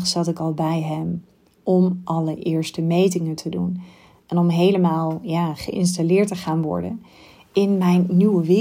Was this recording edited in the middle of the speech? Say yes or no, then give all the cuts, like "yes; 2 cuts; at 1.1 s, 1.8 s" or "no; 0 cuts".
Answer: no; 0 cuts